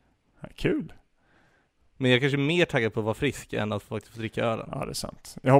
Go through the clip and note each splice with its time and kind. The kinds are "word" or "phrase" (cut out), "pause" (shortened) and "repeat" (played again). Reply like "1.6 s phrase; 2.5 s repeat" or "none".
none